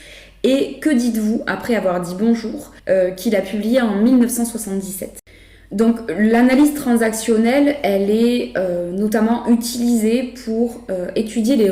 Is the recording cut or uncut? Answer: cut